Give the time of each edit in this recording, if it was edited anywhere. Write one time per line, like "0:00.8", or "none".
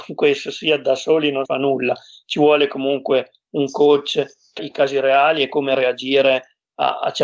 0:01.5
0:04.6